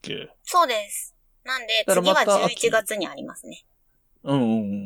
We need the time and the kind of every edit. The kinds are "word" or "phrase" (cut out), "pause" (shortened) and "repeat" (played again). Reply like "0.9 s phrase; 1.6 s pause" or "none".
none